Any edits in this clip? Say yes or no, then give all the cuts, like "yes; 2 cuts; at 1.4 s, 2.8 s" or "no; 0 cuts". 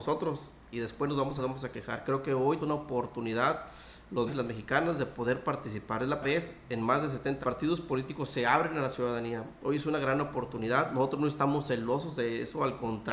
yes; 5 cuts; at 1.4 s, 2.6 s, 4.3 s, 6.2 s, 7.4 s